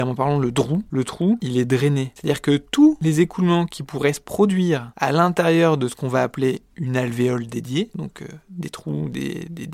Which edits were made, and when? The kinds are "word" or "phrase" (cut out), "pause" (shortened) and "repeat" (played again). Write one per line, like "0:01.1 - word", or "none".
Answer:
none